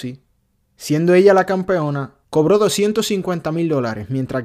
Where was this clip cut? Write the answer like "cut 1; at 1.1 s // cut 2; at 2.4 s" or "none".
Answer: cut 1; at 2.2 s